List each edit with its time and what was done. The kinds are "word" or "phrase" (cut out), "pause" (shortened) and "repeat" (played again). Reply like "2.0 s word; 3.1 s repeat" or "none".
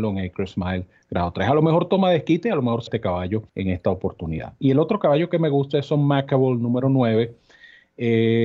2.9 s word; 3.5 s pause